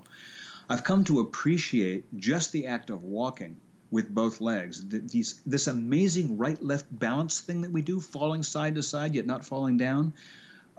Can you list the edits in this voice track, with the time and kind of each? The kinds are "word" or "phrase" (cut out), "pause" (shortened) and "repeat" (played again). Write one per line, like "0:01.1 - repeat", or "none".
none